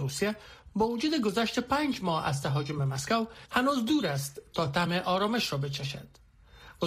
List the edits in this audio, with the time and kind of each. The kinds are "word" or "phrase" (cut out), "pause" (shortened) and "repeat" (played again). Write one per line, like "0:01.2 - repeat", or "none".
none